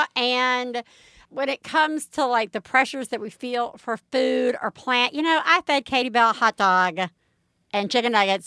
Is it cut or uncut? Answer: uncut